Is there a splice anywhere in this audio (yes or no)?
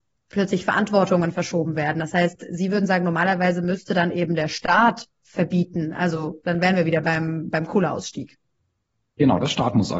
no